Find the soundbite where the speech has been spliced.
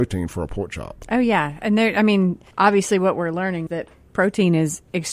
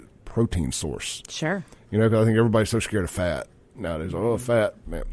first; 2 cuts; at 2.5 s, 3.7 s

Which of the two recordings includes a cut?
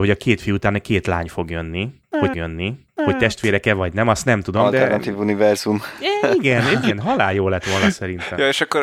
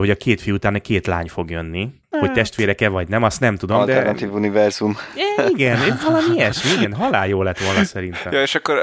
first; 2 cuts; at 2.3 s, 6.8 s

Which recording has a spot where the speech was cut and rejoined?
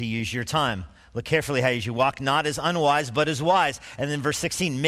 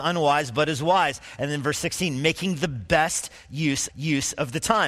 second; 1 cut; at 3.9 s

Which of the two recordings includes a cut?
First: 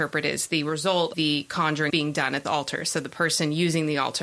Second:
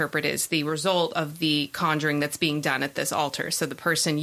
first; 3 cuts; at 1.1 s, 1.9 s, 2.4 s

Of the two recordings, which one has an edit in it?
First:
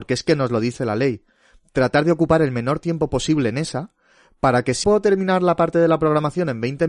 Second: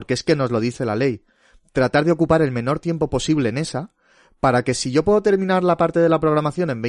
first; 1 cut; at 4.8 s

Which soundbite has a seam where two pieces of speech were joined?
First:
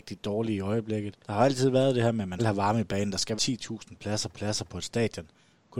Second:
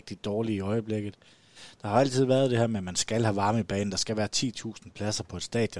first; 4 cuts; at 1.2 s, 2.4 s, 3.4 s, 4.3 s

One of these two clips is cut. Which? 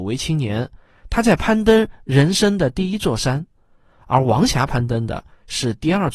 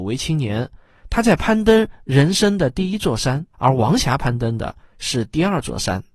second; 1 cut; at 3.5 s

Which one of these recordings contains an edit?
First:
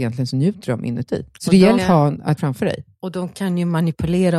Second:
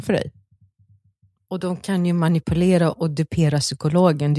first; 4 cuts; at 1.3 s, 1.8 s, 2.4 s, 2.9 s

